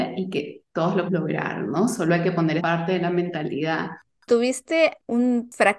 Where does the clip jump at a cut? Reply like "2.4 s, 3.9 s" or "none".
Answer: 1.1 s, 2.6 s